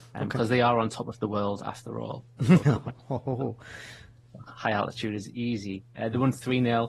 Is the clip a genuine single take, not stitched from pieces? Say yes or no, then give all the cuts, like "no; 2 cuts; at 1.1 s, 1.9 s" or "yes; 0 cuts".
yes; 0 cuts